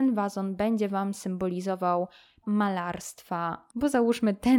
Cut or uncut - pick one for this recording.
cut